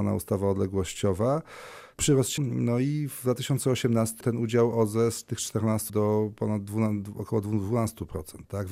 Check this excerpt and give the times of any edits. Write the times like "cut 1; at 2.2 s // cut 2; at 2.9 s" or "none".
cut 1; at 2.0 s // cut 2; at 2.4 s // cut 3; at 4.2 s // cut 4; at 5.9 s